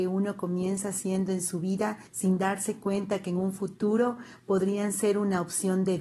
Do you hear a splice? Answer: yes; 1 cut; at 2.1 s

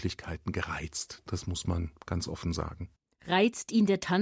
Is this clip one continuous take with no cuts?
yes; 0 cuts

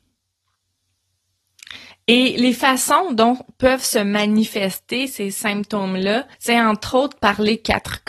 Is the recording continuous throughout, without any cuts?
no; 2 cuts; at 1.9 s, 6.3 s

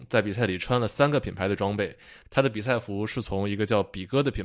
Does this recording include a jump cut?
no; 0 cuts

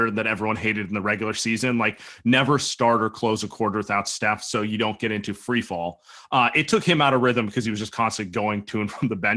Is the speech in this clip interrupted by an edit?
no; 0 cuts

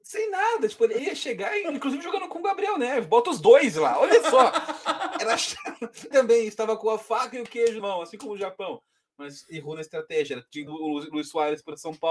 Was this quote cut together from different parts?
yes; 4 cuts; at 1.0 s, 6.1 s, 7.8 s, 10.7 s

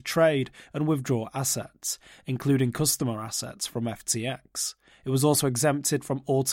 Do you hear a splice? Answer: no; 0 cuts

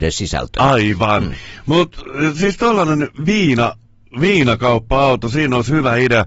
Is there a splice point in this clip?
no; 0 cuts

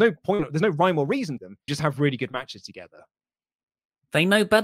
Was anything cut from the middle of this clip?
yes; 2 cuts; at 1.4 s, 1.7 s

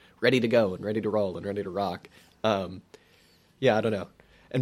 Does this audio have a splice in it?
no; 0 cuts

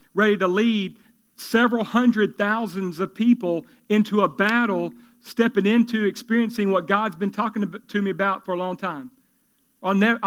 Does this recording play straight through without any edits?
yes; 0 cuts

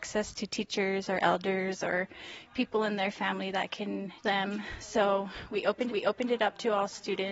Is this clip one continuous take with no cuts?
no; 2 cuts; at 4.2 s, 5.9 s

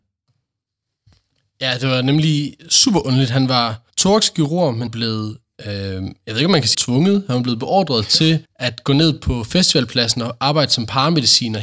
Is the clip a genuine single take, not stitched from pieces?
no; 5 cuts; at 3.9 s, 4.9 s, 5.5 s, 6.7 s, 8.4 s

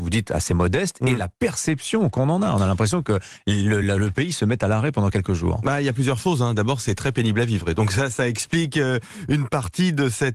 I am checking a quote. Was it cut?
no; 0 cuts

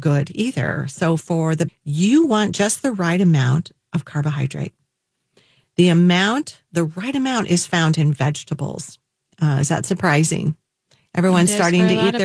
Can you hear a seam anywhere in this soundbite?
yes; 1 cut; at 1.7 s

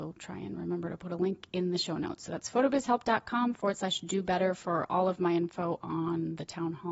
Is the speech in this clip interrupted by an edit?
no; 0 cuts

